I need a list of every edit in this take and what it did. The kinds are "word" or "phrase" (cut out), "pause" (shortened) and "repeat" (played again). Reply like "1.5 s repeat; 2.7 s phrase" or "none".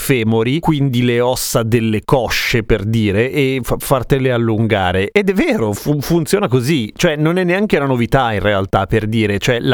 none

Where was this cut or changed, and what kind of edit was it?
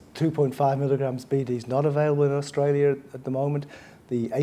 none

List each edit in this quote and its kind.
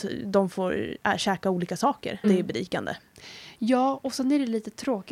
2.2 s word

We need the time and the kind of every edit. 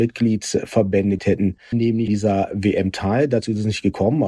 1.2 s word; 1.7 s word; 2.1 s word

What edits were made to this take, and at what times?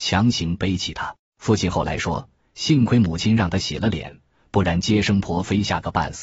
1.2 s pause

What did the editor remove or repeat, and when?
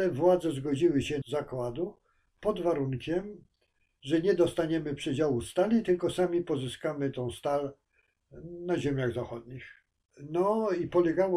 1.2 s word

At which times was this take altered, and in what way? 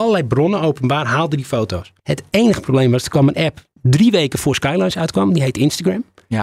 2.0 s pause; 3.7 s pause

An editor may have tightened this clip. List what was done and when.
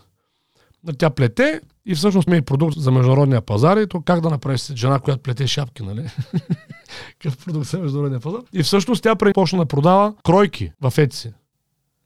2.3 s word; 2.7 s word; 8.5 s pause; 9.3 s phrase; 10.7 s pause

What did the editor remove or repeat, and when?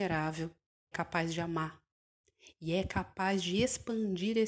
0.9 s word

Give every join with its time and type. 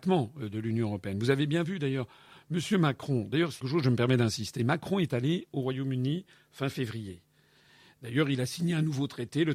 3.6 s word

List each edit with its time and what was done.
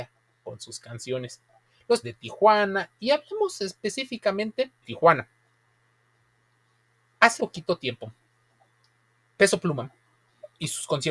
2.0 s word; 4.8 s word; 7.4 s word; 9.4 s word

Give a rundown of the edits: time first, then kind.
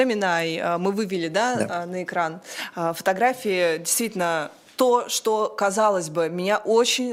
none

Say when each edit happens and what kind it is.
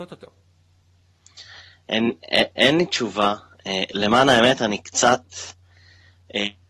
none

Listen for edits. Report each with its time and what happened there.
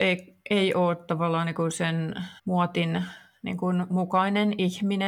2.4 s pause

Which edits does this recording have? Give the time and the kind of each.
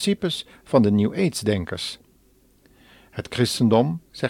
none

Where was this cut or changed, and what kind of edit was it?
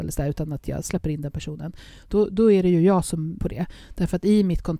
3.4 s word

